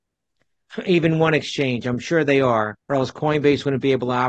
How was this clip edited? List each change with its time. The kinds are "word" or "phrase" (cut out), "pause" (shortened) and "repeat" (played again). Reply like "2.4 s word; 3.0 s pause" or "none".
2.8 s pause